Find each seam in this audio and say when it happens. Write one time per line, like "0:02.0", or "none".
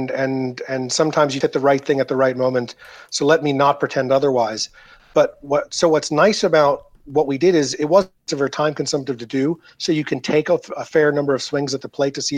0:01.4
0:08.2

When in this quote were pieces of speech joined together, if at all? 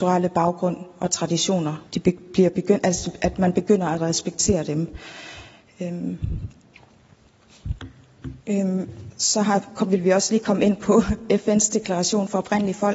0:01.9
0:08.4

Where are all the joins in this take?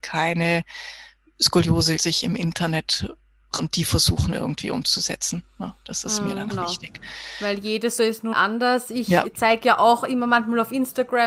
0:02.0
0:03.6
0:06.5
0:08.0
0:08.3

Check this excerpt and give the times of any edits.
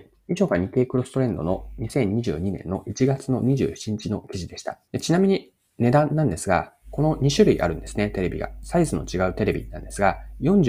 0:04.9

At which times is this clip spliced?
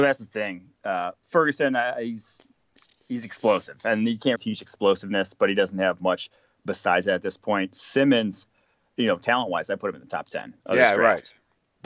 0:04.4

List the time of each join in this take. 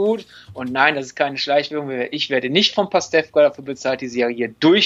none

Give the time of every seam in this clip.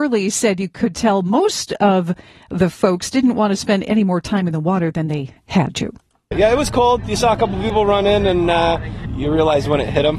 none

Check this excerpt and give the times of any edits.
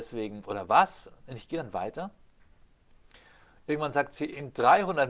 none

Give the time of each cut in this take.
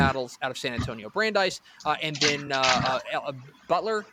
none

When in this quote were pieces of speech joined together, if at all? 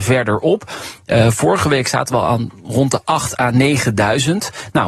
none

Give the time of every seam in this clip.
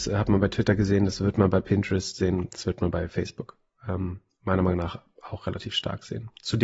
none

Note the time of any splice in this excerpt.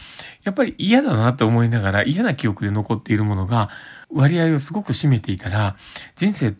0:04.0

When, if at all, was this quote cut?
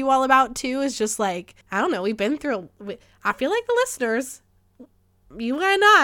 0:01.6

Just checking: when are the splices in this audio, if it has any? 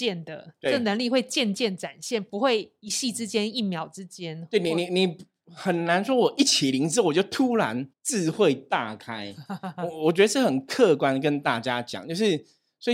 0:07.9

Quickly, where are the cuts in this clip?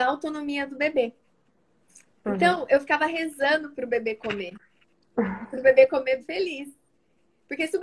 0:06.2

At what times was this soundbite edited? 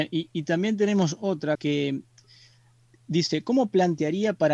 0:01.5

